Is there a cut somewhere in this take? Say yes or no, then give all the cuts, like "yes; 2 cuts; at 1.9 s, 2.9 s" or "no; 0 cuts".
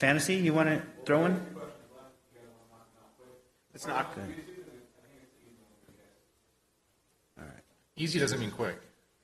no; 0 cuts